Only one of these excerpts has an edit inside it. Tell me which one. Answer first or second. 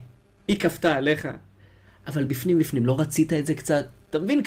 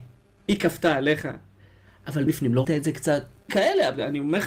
second